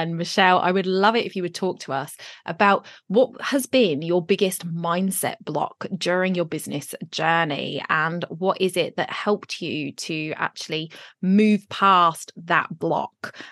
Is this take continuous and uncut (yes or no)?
yes